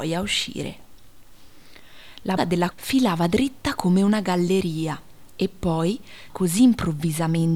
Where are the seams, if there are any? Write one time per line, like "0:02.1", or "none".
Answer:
0:02.4
0:02.7
0:06.3